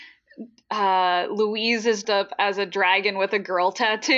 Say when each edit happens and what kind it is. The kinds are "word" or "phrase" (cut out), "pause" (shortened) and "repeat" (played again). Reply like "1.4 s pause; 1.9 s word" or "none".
2.0 s word